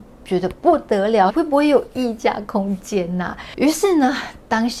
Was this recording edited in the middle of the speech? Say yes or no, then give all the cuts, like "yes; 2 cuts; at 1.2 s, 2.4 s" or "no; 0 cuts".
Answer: yes; 1 cut; at 1.3 s